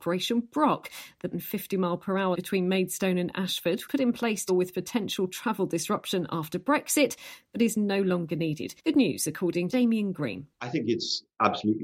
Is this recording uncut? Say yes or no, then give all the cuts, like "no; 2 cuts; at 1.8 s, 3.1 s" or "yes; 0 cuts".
no; 7 cuts; at 1.3 s, 2.3 s, 3.9 s, 4.5 s, 8.8 s, 9.7 s, 10.5 s